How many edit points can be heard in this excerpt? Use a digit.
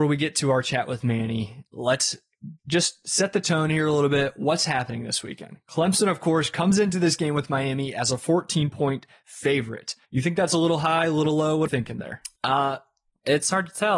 4